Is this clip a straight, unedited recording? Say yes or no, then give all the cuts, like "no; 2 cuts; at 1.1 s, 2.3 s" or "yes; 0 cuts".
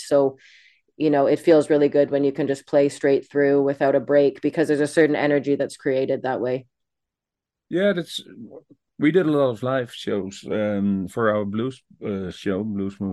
yes; 0 cuts